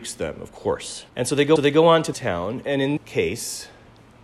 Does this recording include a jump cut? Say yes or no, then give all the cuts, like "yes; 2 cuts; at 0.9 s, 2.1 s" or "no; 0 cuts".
yes; 4 cuts; at 1.1 s, 1.6 s, 2.1 s, 3.0 s